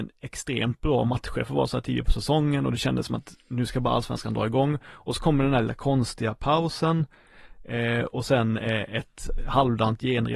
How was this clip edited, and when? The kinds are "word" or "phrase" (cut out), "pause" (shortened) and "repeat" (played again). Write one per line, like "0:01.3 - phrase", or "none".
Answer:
none